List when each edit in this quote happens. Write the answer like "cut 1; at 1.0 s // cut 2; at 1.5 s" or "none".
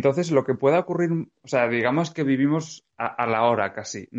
cut 1; at 1.4 s